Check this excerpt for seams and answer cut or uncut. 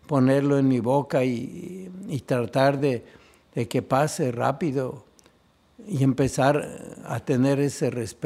uncut